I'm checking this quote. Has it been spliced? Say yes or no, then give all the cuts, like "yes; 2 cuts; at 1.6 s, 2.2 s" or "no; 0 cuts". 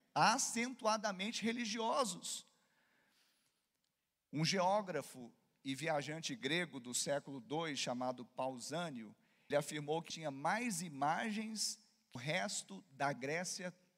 yes; 3 cuts; at 9.5 s, 10.1 s, 12.2 s